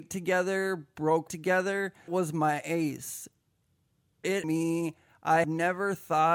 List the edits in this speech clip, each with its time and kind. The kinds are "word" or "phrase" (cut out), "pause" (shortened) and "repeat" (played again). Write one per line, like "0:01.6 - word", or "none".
0:01.3 - word
0:02.1 - word
0:04.4 - word
0:05.4 - word